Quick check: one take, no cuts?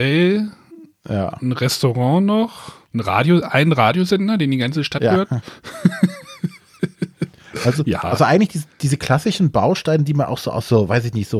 no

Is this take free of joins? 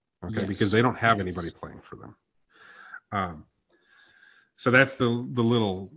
yes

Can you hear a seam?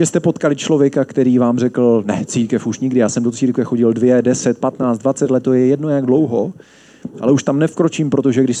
no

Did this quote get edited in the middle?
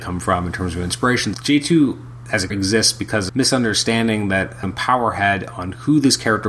yes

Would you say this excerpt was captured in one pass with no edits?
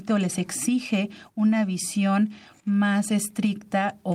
yes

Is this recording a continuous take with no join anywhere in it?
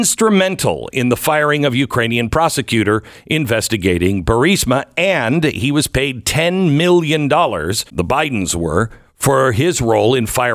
no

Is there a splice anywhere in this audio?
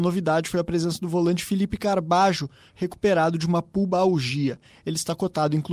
no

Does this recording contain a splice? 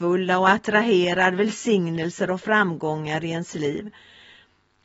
no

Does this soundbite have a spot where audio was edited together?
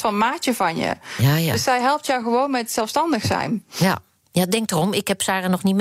no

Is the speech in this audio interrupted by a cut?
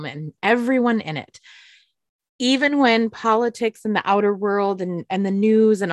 no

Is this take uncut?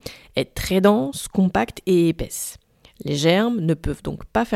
yes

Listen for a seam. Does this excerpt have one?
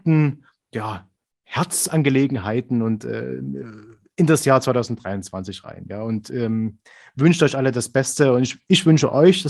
no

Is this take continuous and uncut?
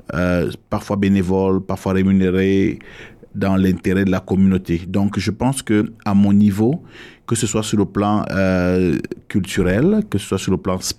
yes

